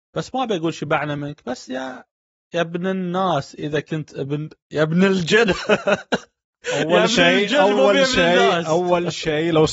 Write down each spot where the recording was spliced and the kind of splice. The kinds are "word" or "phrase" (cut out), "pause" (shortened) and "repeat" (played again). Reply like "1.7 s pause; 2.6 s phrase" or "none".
none